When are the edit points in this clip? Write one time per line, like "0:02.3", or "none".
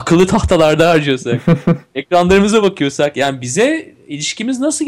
none